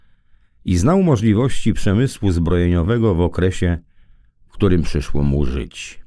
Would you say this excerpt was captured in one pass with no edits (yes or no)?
yes